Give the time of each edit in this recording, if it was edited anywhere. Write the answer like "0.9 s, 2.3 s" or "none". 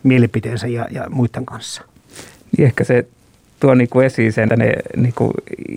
4.5 s